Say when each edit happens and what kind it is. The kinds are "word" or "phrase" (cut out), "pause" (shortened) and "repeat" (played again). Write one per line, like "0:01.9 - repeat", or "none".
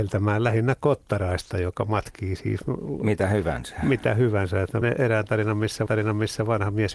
0:04.8 - word
0:05.9 - repeat